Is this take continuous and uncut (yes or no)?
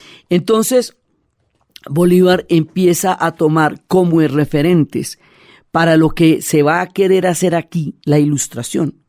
yes